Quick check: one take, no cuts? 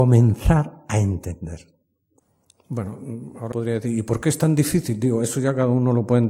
no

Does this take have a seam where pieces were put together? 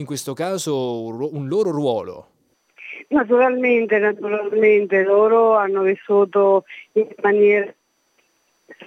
no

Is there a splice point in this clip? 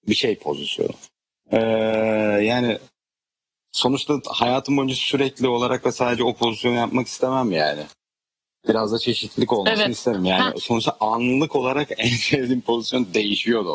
no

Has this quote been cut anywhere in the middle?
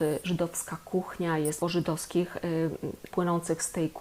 yes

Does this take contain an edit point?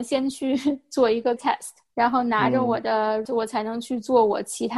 yes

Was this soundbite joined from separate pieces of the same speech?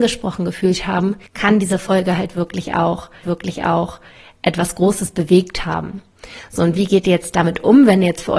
yes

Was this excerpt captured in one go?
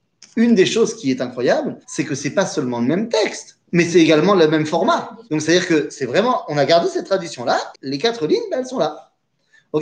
no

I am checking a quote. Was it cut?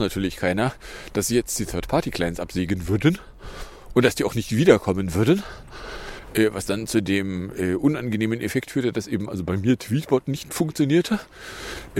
no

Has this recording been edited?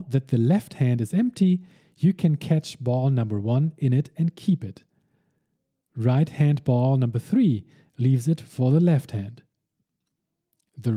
no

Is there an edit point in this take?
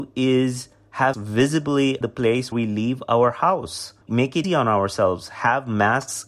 yes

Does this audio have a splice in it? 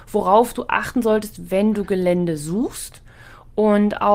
no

